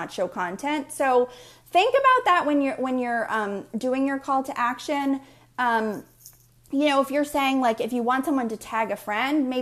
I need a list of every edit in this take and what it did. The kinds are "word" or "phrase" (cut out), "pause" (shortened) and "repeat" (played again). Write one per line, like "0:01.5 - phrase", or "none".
none